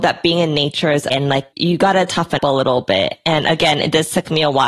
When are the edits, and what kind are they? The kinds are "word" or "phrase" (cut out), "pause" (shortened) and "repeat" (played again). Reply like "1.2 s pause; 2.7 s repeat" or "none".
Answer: 1.1 s word; 2.4 s word